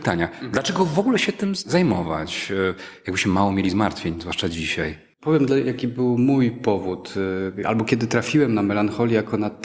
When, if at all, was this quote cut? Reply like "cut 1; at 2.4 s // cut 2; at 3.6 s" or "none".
cut 1; at 5.1 s

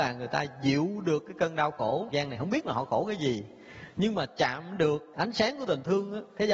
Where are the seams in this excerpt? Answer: cut 1; at 2.1 s // cut 2; at 5.1 s

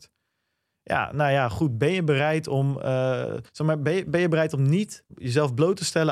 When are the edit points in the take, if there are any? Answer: cut 1; at 3.5 s

